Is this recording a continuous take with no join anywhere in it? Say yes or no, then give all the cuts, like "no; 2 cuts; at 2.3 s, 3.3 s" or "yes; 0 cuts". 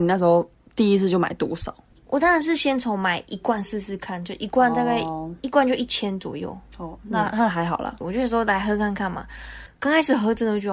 no; 1 cut; at 8.0 s